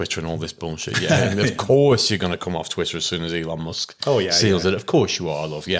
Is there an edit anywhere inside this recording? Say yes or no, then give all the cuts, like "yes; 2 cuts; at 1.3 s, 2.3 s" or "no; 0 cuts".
no; 0 cuts